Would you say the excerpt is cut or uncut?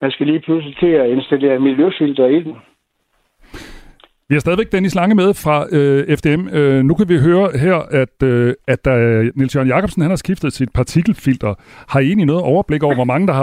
uncut